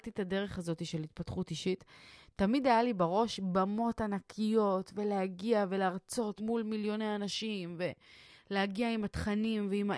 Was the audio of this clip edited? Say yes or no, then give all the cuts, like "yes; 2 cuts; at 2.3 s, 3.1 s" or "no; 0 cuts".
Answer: yes; 1 cut; at 6.4 s